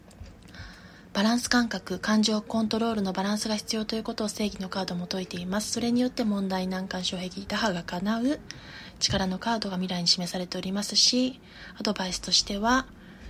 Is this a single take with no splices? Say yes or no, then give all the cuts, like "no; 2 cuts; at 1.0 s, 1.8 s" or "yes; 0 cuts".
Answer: yes; 0 cuts